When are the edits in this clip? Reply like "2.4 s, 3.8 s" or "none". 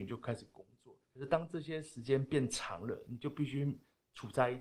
1.0 s

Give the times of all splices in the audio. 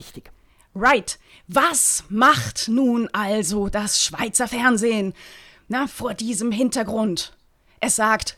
none

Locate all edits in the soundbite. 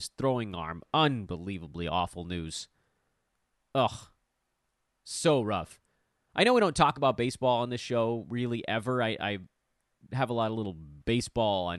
none

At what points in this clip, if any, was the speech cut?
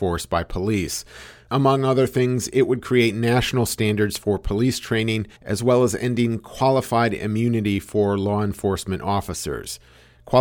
5.4 s

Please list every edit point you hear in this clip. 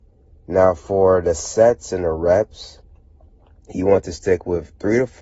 none

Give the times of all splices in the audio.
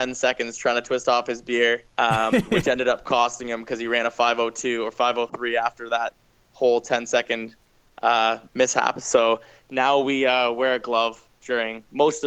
1.9 s, 8.5 s

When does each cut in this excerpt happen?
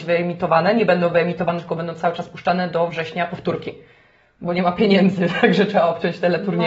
none

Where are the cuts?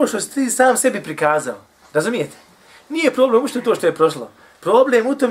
none

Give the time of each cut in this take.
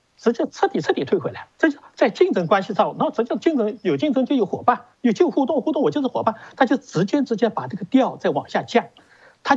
1.5 s, 4.9 s

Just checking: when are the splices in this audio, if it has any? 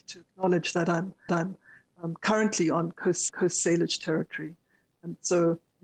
1.3 s, 3.3 s

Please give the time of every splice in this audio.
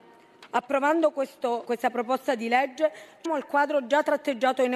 1.6 s, 3.3 s

